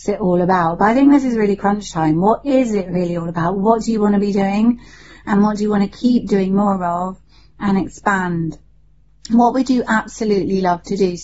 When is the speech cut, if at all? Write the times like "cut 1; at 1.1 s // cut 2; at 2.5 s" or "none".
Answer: none